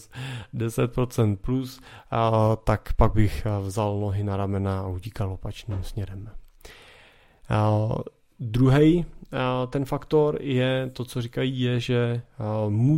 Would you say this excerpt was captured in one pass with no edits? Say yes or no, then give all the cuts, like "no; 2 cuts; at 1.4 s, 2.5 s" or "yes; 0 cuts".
yes; 0 cuts